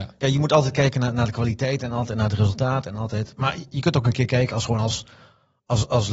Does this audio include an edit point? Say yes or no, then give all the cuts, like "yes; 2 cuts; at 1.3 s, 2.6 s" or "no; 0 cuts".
no; 0 cuts